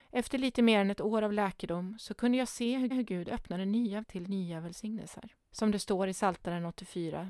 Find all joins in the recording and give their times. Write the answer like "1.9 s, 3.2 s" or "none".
2.9 s, 4.0 s, 5.4 s